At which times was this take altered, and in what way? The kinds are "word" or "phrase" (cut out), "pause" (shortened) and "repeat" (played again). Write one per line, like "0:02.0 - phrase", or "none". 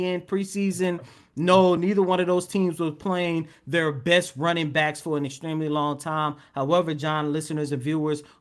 none